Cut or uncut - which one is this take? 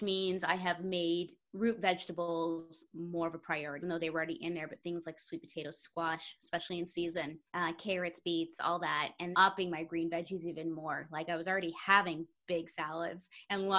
cut